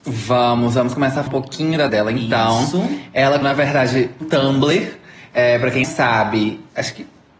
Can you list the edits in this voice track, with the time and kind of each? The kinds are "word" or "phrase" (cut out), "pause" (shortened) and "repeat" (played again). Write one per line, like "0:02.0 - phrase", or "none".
0:01.3 - word
0:01.9 - word
0:03.4 - word
0:04.2 - word
0:05.8 - word